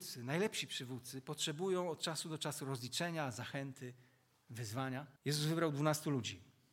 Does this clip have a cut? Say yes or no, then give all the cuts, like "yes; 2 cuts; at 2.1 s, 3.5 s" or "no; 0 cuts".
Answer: yes; 1 cut; at 5.2 s